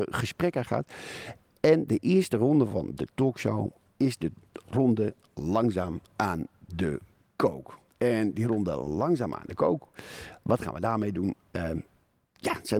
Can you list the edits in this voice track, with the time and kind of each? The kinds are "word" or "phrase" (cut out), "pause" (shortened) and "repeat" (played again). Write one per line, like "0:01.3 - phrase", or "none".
none